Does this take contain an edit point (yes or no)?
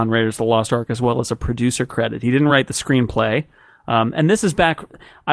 no